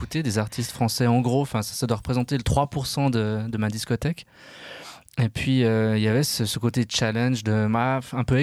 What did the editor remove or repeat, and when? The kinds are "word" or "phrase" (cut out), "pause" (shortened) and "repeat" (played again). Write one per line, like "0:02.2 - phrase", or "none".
none